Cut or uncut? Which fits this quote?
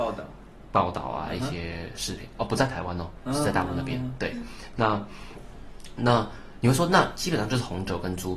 uncut